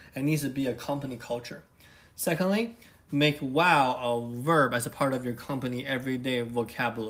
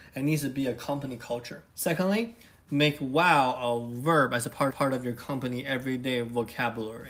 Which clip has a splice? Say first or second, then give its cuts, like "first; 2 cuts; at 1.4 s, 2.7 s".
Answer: second; 2 cuts; at 1.7 s, 4.7 s